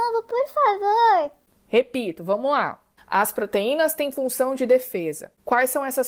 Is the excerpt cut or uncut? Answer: uncut